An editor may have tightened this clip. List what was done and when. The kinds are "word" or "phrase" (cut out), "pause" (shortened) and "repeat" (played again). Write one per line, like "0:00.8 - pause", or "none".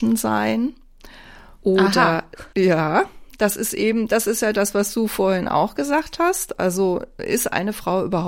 0:01.6 - pause
0:02.5 - pause